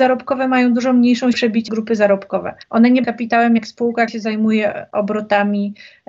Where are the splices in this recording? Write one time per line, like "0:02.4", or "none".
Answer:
0:01.3
0:01.7
0:02.6
0:03.0
0:04.1